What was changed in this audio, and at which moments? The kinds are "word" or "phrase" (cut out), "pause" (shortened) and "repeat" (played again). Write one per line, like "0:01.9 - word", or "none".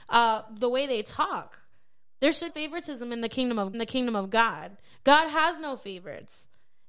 0:02.5 - phrase
0:03.7 - repeat